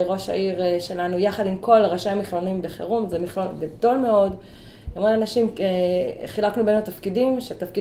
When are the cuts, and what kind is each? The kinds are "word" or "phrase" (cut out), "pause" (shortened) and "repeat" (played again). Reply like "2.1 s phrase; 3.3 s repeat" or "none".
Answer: none